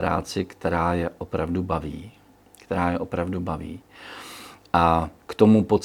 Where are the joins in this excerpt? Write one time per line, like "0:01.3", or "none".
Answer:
none